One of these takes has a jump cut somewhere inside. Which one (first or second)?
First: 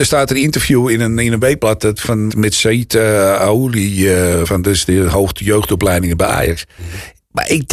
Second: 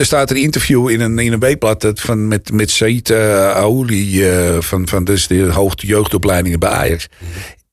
first